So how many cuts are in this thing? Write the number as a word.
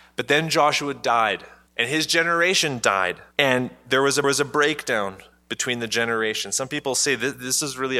three